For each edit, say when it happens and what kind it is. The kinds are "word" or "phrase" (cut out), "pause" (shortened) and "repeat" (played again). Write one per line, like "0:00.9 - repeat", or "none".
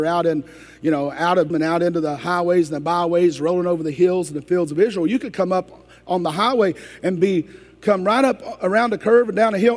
0:01.5 - word